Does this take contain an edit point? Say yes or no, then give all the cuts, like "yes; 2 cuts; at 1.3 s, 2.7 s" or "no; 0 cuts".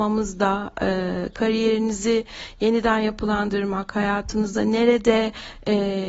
no; 0 cuts